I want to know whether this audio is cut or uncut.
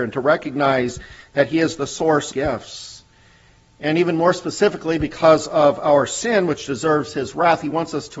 cut